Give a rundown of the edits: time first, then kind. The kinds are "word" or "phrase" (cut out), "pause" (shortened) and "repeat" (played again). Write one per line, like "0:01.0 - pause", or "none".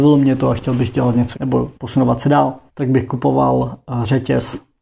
0:01.3 - word
0:01.8 - pause
0:02.7 - pause